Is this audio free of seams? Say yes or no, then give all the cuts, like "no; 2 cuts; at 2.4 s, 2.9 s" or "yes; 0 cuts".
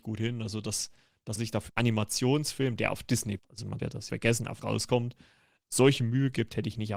no; 7 cuts; at 1.4 s, 1.7 s, 3.4 s, 3.8 s, 4.1 s, 4.6 s, 5.6 s